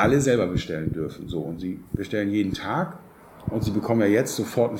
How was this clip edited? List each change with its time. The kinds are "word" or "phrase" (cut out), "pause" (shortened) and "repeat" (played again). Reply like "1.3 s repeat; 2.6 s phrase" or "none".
none

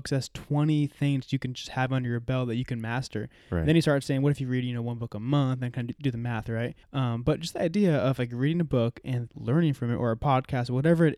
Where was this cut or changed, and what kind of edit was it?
6.8 s pause; 9.3 s word

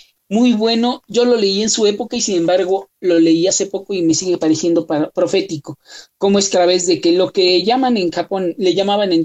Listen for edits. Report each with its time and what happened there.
6.5 s word

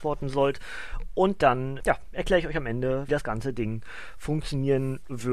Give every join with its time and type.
1.8 s word; 3.1 s word

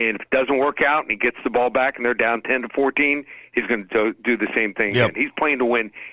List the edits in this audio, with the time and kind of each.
none

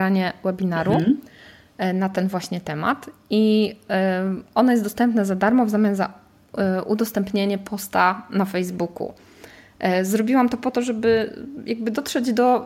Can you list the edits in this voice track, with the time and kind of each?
none

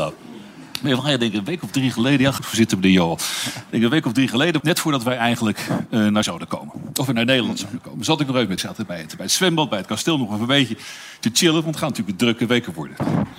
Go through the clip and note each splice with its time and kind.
2.4 s phrase; 4.6 s word; 6.2 s word; 8.6 s phrase

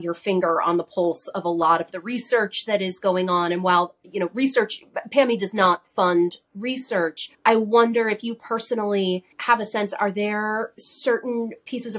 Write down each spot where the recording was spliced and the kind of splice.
7.3 s pause; 9.3 s pause

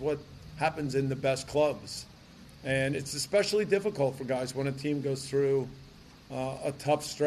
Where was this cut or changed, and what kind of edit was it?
none

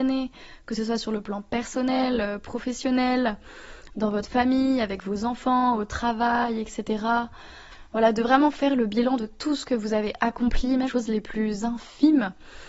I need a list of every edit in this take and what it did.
10.9 s word

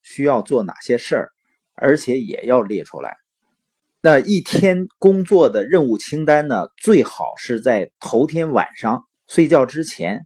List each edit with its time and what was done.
9.1 s pause

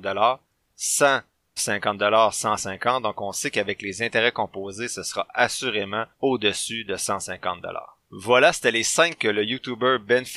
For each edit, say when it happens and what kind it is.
1.6 s word; 6.1 s pause; 8.0 s pause; 9.2 s word

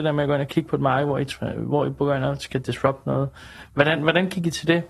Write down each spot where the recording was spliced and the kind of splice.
none

